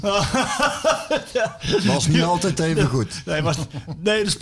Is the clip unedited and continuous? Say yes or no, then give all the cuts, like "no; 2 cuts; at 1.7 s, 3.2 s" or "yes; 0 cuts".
yes; 0 cuts